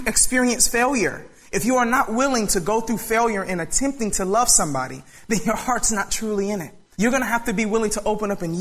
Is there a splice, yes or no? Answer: no